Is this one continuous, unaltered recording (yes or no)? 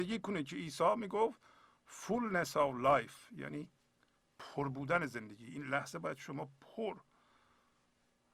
yes